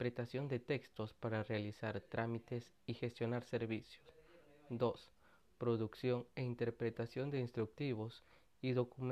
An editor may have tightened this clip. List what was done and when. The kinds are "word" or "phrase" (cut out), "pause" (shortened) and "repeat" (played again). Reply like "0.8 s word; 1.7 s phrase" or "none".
none